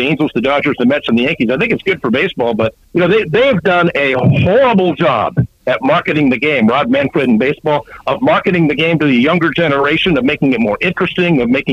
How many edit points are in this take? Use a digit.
1